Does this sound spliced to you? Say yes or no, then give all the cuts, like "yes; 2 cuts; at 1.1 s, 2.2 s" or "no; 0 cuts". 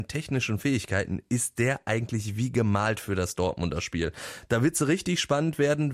no; 0 cuts